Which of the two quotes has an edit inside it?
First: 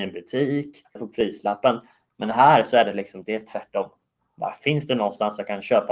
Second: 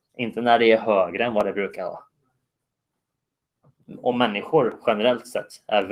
first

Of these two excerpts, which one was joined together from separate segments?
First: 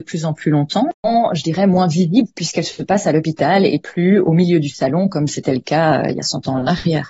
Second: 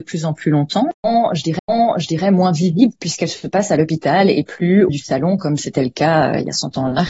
second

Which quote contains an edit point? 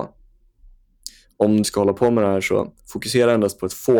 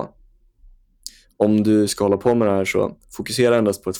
first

